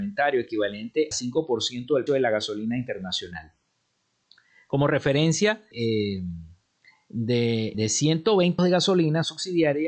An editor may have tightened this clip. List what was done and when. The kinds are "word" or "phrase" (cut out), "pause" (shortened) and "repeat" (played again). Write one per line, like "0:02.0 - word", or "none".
0:01.1 - word
0:02.1 - word
0:05.7 - word
0:07.7 - word
0:08.6 - word